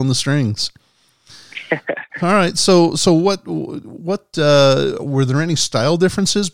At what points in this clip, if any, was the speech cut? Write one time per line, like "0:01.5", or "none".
0:02.1